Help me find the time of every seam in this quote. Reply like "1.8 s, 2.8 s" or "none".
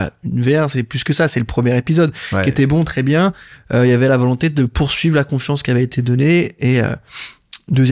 none